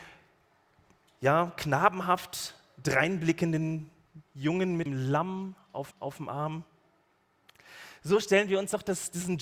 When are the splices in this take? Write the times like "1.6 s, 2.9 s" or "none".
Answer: 4.9 s, 5.9 s